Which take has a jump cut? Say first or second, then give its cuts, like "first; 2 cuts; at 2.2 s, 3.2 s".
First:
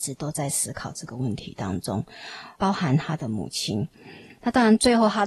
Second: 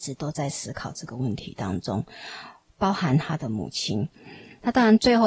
first; 1 cut; at 2.5 s